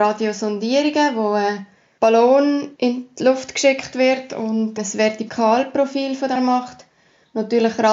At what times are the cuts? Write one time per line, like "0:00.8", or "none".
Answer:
0:06.4